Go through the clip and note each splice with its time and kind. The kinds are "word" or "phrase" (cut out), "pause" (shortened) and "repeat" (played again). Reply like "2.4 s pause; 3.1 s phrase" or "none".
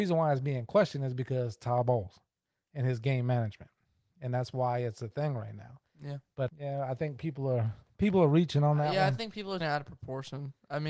6.5 s word; 9.6 s word